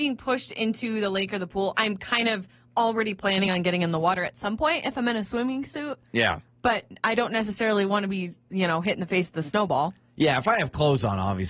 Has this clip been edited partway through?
no; 0 cuts

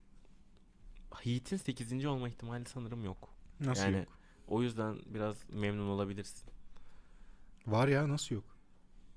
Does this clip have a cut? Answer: no; 0 cuts

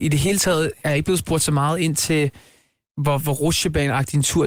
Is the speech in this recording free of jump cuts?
no; 1 cut; at 2.8 s

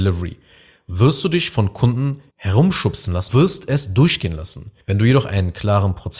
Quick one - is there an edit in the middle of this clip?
yes; 3 cuts; at 2.3 s, 3.3 s, 4.8 s

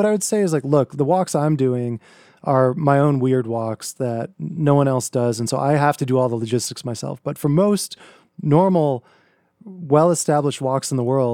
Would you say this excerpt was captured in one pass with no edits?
yes; 0 cuts

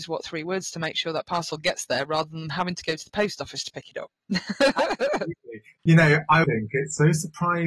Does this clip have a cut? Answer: yes; 1 cut; at 6.4 s

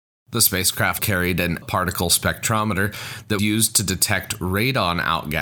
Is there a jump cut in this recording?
yes; 3 cuts; at 1.0 s, 1.6 s, 3.4 s

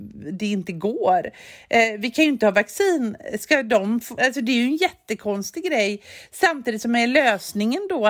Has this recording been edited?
yes; 1 cut; at 4.2 s

